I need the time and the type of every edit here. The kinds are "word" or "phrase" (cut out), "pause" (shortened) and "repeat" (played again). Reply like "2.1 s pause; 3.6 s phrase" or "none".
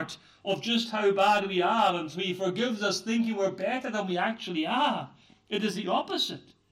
none